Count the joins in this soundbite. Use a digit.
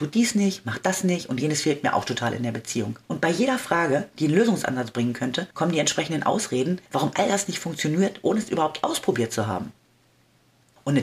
3